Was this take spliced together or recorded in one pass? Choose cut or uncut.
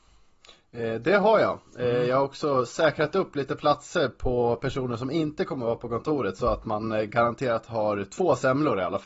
uncut